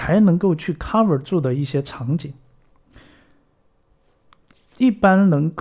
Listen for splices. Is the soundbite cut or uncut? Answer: uncut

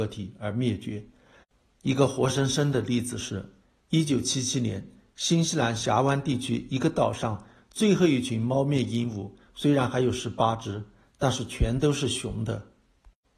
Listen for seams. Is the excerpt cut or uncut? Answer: uncut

